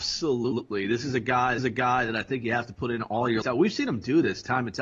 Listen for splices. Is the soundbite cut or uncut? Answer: cut